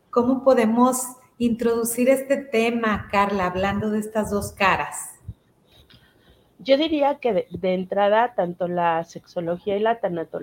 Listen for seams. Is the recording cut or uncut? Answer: uncut